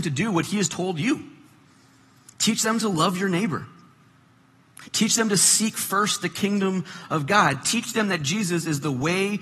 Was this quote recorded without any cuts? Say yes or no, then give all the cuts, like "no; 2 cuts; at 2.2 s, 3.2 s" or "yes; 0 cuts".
yes; 0 cuts